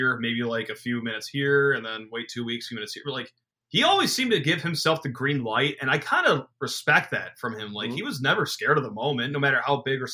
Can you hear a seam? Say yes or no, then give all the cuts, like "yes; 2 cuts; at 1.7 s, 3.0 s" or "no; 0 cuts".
yes; 2 cuts; at 3.4 s, 6.5 s